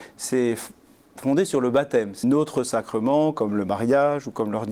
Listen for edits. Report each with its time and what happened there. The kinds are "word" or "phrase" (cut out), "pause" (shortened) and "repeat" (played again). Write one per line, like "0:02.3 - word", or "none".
0:02.2 - phrase